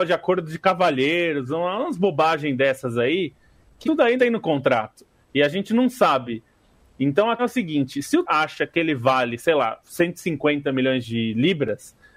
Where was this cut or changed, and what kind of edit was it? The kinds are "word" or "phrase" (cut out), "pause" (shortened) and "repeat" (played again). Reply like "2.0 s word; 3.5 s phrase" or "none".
3.8 s word; 4.2 s word; 7.4 s word; 8.2 s word